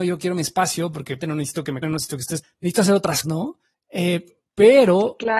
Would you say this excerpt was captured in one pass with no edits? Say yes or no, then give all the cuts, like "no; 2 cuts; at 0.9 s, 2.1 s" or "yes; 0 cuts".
no; 5 cuts; at 1.2 s, 1.8 s, 2.4 s, 3.2 s, 3.7 s